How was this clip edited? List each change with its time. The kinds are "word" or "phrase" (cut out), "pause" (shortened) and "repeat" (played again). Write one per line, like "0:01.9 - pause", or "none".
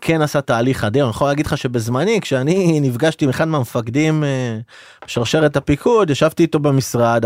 none